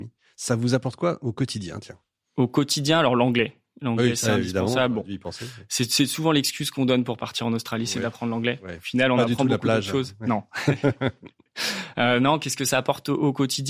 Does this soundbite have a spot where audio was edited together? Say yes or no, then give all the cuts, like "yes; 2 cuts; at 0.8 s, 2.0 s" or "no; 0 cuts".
no; 0 cuts